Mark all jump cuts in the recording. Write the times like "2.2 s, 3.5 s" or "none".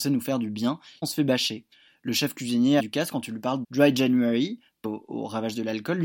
1.0 s, 2.8 s, 3.6 s, 4.8 s

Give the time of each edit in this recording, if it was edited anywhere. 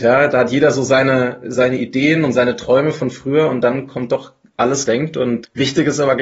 4.9 s

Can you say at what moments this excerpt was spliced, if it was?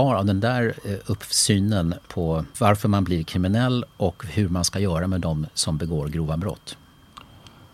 2.1 s, 2.5 s

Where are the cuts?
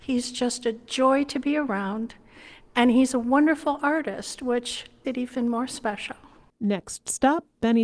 5.0 s

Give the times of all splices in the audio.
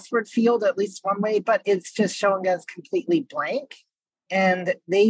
none

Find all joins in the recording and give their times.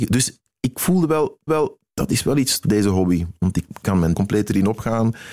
1.5 s, 2.6 s, 4.1 s

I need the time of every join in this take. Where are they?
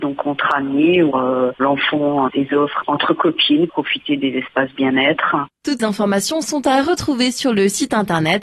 1.1 s, 2.3 s, 3.7 s, 5.8 s

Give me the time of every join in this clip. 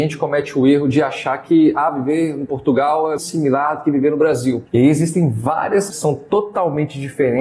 3.2 s, 4.7 s, 5.9 s

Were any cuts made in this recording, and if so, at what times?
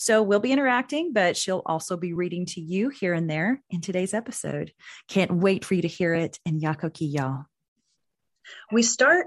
none

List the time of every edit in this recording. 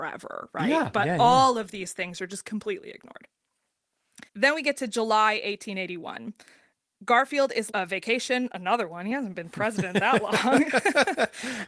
4.3 s, 7.7 s

